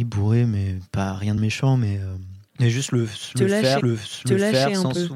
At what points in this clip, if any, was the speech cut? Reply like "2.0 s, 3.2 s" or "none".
1.4 s, 2.5 s, 3.8 s